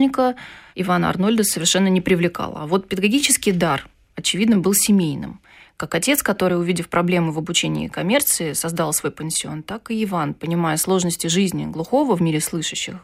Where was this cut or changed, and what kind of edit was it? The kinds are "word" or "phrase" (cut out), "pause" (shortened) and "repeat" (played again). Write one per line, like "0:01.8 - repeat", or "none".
none